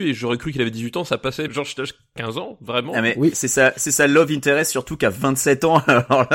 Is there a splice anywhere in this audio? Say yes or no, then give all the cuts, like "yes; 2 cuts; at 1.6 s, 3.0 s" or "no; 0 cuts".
yes; 1 cut; at 1.5 s